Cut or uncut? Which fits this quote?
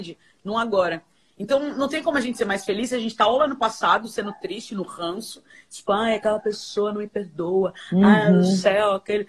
uncut